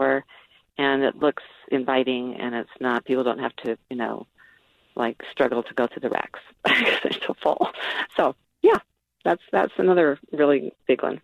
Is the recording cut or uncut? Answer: uncut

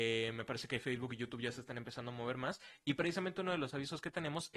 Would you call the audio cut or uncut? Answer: uncut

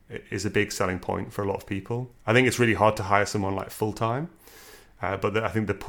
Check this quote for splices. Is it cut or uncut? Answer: cut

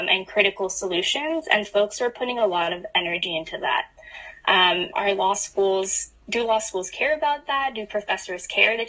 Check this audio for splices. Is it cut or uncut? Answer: cut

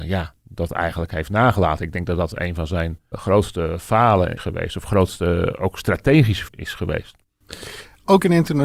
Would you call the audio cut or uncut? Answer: cut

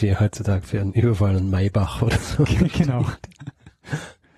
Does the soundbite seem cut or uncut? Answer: uncut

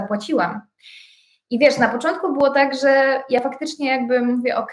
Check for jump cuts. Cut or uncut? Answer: uncut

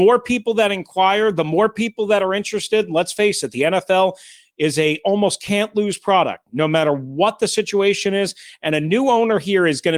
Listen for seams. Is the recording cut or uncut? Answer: uncut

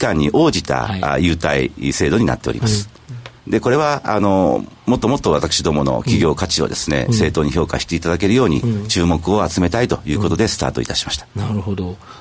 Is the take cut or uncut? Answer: cut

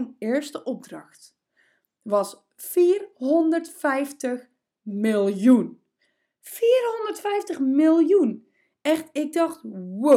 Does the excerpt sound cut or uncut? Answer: uncut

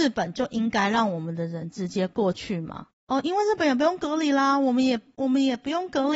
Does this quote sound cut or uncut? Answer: cut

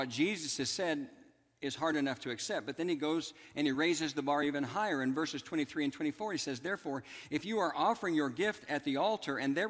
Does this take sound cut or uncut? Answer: uncut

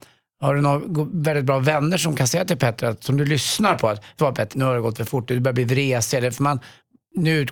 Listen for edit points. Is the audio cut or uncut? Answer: cut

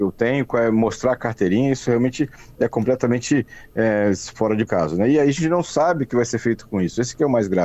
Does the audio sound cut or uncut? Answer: cut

